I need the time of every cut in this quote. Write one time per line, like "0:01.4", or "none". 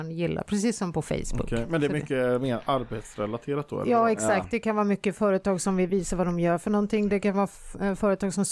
none